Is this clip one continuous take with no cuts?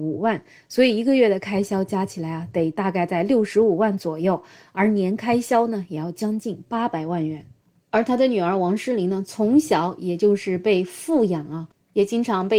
yes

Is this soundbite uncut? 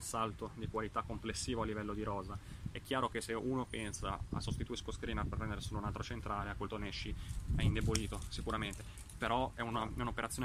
no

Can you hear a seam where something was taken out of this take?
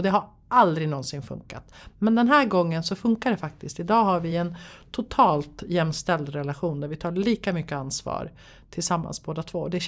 no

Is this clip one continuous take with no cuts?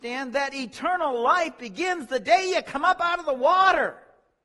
yes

